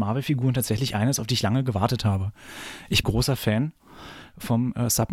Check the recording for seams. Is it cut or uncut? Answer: cut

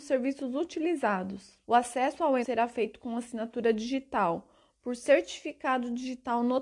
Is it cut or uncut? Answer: cut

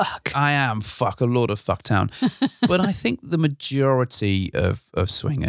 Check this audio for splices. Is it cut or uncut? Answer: uncut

